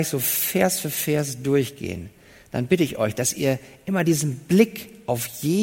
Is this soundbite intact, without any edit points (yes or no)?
yes